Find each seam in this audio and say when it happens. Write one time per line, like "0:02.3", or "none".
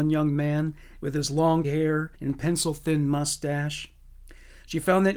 0:01.6
0:02.1